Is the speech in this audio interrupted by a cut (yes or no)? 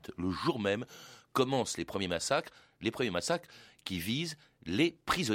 no